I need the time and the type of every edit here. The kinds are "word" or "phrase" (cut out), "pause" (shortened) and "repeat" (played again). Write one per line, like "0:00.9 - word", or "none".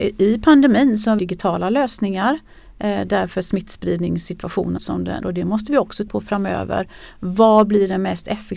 0:01.2 - phrase
0:04.8 - phrase
0:05.2 - word
0:06.1 - word